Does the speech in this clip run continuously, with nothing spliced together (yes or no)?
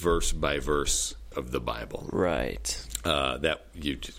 no